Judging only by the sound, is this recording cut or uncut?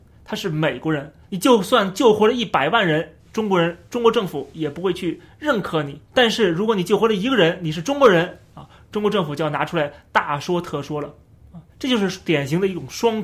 cut